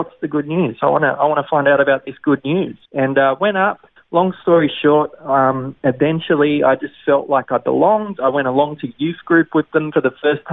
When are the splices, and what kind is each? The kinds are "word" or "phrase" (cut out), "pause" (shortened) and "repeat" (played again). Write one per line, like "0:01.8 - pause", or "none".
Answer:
0:02.8 - pause
0:04.0 - pause